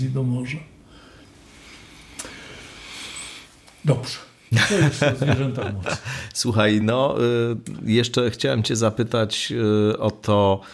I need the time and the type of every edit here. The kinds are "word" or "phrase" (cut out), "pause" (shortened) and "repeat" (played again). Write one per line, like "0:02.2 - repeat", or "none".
none